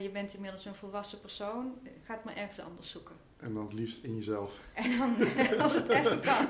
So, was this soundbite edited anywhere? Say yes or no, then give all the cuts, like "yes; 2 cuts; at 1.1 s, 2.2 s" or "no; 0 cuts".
yes; 1 cut; at 3.3 s